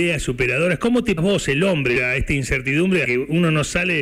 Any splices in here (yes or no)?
yes